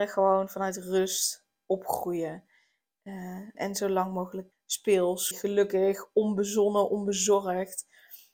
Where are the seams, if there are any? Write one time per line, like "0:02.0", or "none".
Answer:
0:03.5
0:04.5
0:05.3